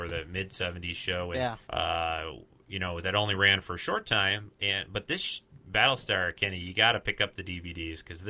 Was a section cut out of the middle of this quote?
yes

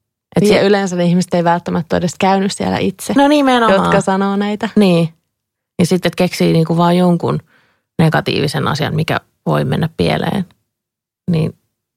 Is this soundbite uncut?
yes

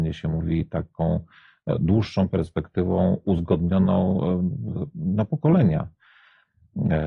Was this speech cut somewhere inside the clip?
no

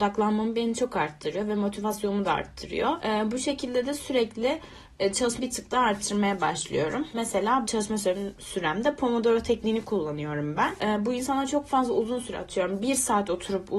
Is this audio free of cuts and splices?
no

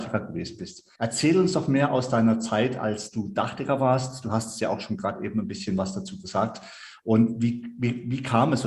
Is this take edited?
yes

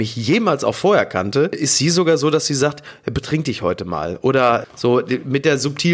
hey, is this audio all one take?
yes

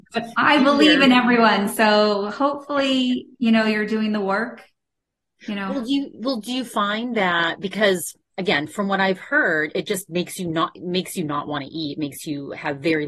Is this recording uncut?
yes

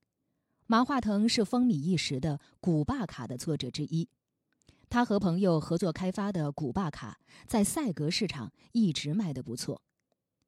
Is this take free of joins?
yes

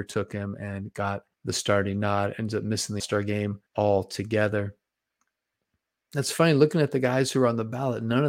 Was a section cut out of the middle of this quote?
yes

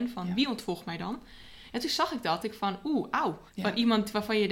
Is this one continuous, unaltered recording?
no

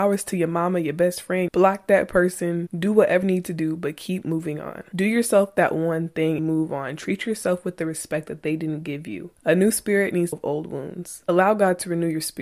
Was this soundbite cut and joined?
yes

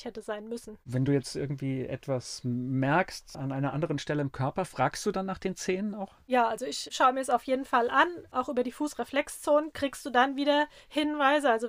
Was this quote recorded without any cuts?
yes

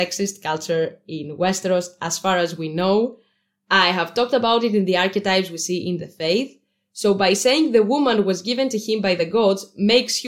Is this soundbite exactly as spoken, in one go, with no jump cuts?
yes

